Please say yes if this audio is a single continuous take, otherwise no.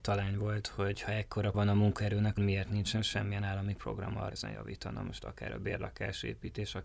no